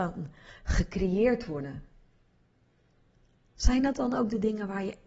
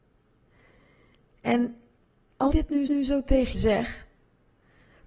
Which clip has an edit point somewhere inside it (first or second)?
second